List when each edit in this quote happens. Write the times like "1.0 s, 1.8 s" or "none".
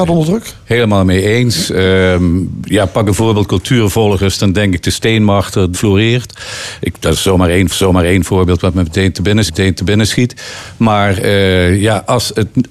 5.7 s, 7.7 s, 9.5 s